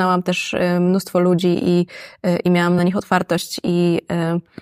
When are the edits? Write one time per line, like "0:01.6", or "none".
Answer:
none